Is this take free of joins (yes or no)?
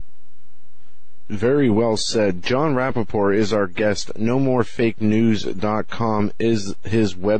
yes